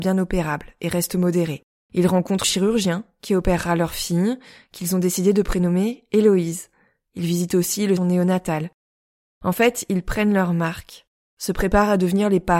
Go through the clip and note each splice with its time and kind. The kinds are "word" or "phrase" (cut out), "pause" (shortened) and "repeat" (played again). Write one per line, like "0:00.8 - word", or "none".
0:02.4 - word
0:08.0 - phrase

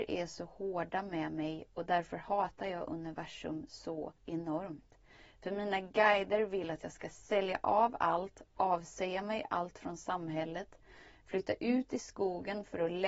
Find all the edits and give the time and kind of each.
0:04.2 - pause

